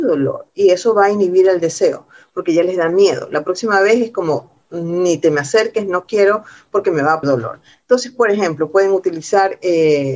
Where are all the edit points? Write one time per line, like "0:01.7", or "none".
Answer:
0:07.2